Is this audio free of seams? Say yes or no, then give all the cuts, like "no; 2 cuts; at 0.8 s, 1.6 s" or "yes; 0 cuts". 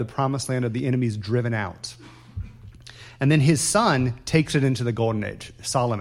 yes; 0 cuts